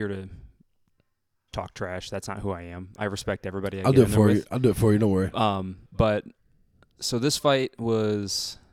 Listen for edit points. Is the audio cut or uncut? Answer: cut